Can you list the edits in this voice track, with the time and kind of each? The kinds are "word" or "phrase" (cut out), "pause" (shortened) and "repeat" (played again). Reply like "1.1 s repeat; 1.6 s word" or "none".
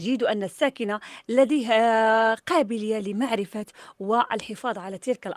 none